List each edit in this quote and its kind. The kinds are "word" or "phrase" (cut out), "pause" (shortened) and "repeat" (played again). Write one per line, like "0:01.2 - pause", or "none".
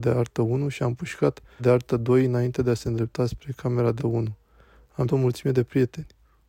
0:01.6 - word
0:04.0 - word
0:05.1 - word